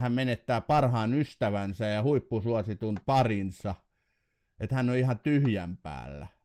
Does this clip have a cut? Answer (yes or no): no